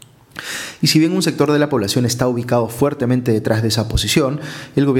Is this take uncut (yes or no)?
yes